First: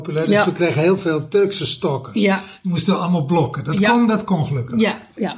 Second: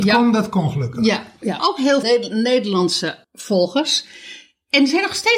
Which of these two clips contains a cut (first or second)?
second